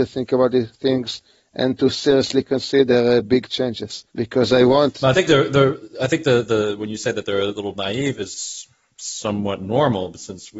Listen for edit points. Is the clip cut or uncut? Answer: cut